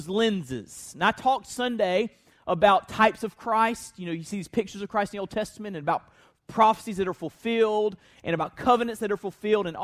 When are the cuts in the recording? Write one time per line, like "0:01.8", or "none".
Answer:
none